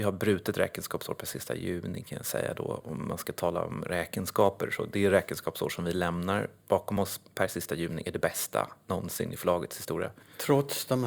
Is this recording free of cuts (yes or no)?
yes